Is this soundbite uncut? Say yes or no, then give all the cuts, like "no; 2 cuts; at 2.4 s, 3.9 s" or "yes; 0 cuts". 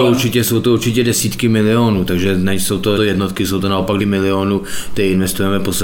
no; 2 cuts; at 2.9 s, 4.0 s